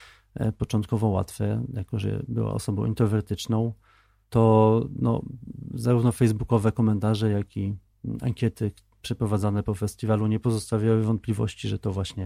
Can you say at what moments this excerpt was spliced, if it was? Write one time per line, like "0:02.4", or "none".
none